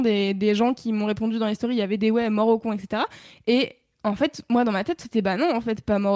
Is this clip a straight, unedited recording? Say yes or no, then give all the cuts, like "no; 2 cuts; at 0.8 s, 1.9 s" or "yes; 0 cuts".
yes; 0 cuts